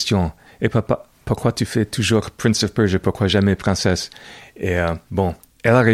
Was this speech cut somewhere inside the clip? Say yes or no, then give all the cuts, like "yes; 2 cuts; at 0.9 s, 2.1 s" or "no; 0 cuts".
no; 0 cuts